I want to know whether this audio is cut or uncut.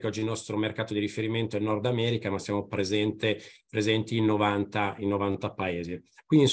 uncut